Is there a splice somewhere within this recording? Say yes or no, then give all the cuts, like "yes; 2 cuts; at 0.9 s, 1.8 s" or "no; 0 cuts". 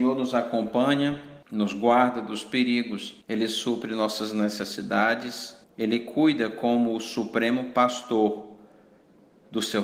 yes; 3 cuts; at 1.4 s, 3.2 s, 5.6 s